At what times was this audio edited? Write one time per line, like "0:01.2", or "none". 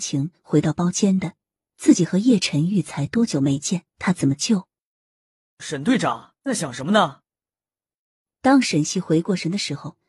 0:03.9
0:06.4